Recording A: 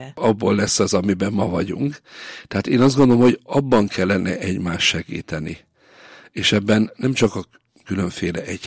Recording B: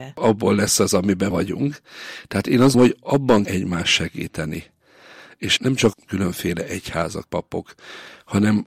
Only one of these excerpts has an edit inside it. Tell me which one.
B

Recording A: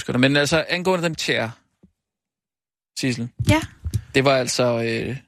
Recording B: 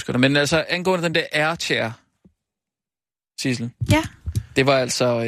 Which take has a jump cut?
A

